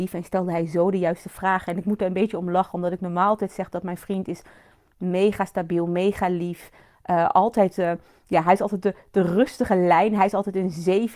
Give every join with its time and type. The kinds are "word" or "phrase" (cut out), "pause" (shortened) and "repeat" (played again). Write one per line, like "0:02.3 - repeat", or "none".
none